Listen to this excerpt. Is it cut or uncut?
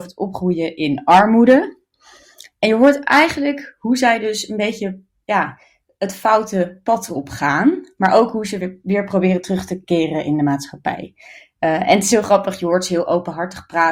uncut